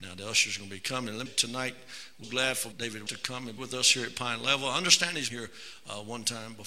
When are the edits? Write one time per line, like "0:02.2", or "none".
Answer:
0:01.3
0:02.2
0:02.7
0:03.1
0:03.6
0:05.3